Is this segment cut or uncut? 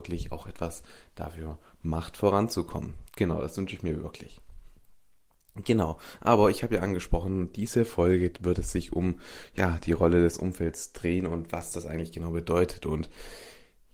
uncut